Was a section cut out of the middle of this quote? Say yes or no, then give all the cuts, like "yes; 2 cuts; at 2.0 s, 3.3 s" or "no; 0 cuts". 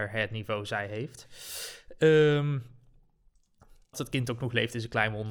yes; 1 cut; at 3.9 s